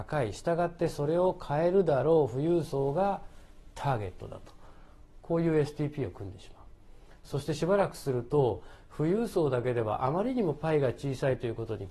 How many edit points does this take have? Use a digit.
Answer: 0